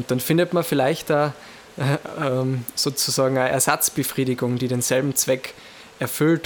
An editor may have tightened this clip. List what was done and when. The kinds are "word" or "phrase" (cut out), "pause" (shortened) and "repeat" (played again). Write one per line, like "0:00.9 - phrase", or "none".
none